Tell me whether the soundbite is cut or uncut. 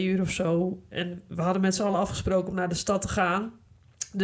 uncut